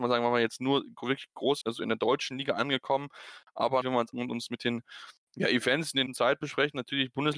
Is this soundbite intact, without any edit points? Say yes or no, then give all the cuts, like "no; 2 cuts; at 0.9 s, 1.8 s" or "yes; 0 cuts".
no; 4 cuts; at 1.6 s, 3.8 s, 4.1 s, 6.1 s